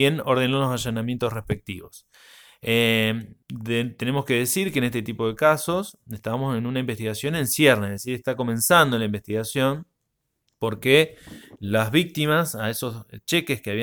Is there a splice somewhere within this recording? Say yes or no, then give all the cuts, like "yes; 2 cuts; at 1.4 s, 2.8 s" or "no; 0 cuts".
yes; 1 cut; at 3.4 s